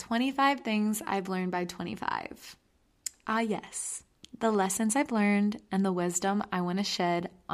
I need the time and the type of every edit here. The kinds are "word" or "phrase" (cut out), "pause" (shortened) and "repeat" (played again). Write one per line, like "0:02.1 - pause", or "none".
none